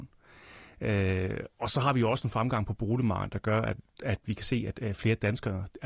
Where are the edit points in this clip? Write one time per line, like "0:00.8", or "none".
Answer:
0:01.5
0:03.9